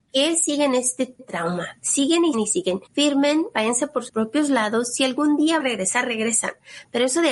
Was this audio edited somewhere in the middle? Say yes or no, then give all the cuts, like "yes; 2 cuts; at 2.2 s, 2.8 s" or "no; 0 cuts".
yes; 5 cuts; at 1.2 s, 2.3 s, 2.9 s, 4.1 s, 5.6 s